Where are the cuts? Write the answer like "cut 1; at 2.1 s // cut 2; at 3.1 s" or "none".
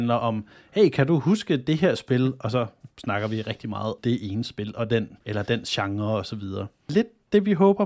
cut 1; at 4.0 s // cut 2; at 5.2 s